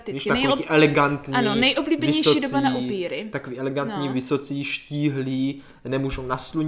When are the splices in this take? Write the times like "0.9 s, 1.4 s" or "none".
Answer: none